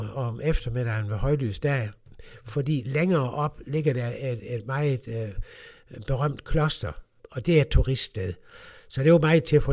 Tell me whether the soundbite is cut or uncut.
uncut